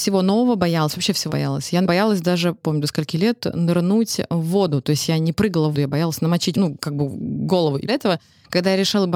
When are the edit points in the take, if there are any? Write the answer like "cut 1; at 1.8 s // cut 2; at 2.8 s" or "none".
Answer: cut 1; at 1.3 s // cut 2; at 1.8 s // cut 3; at 2.6 s // cut 4; at 5.7 s // cut 5; at 6.5 s // cut 6; at 7.9 s